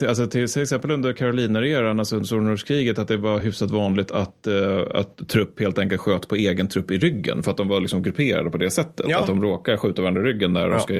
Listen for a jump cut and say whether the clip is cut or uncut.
uncut